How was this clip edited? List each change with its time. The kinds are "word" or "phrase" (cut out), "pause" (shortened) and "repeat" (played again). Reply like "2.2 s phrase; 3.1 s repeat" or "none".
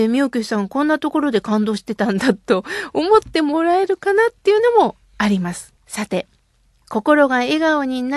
5.8 s pause